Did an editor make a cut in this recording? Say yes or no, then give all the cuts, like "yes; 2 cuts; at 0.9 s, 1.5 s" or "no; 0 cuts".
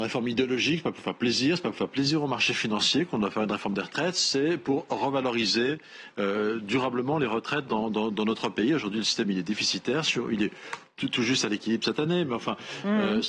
no; 0 cuts